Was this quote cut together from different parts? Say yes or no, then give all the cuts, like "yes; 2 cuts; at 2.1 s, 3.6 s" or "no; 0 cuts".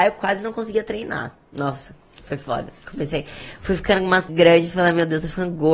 yes; 1 cut; at 4.3 s